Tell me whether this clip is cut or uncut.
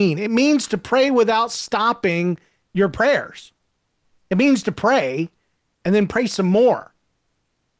uncut